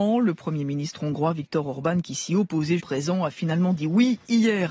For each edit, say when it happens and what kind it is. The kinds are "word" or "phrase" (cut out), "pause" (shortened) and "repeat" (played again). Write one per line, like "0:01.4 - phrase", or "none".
0:02.8 - word